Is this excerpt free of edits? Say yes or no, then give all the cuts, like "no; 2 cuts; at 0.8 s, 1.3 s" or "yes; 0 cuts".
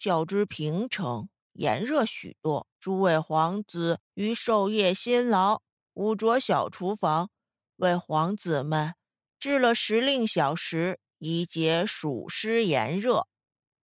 no; 4 cuts; at 2.7 s, 4.1 s, 5.7 s, 11.1 s